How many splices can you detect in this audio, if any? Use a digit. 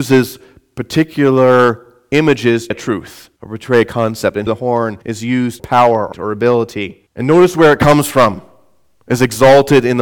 7